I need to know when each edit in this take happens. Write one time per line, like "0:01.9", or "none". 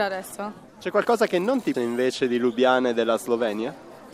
0:01.7